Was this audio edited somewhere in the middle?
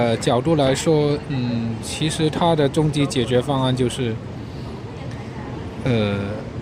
no; 0 cuts

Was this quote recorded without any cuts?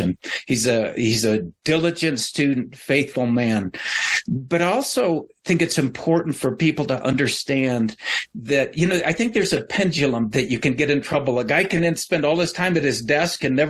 yes; 0 cuts

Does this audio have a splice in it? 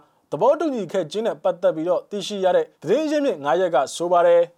yes; 1 cut; at 2.7 s

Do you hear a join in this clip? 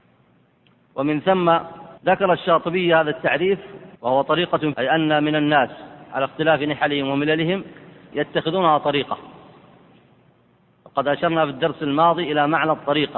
yes; 4 cuts; at 2.0 s, 4.0 s, 4.7 s, 8.1 s

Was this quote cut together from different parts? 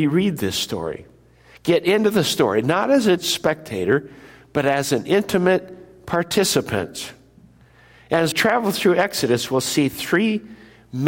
yes; 2 cuts; at 3.2 s, 8.3 s

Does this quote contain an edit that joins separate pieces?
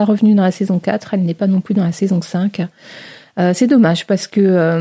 no; 0 cuts

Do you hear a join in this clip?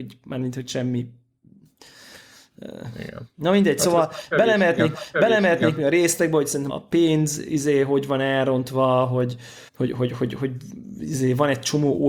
yes; 3 cuts; at 4.9 s, 6.7 s, 9.7 s

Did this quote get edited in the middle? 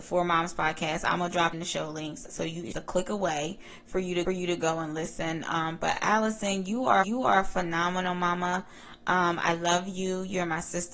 yes; 4 cuts; at 1.5 s, 2.7 s, 4.2 s, 7.0 s

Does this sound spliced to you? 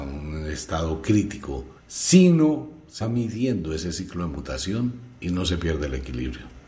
yes; 3 cuts; at 1.8 s, 3.0 s, 5.2 s

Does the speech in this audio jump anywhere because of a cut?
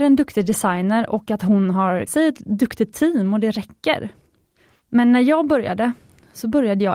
yes; 1 cut; at 2.1 s

